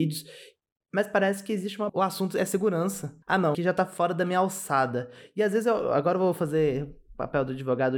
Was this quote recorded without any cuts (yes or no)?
no